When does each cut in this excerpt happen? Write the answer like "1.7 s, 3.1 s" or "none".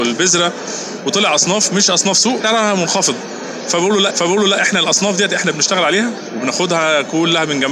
2.4 s, 4.1 s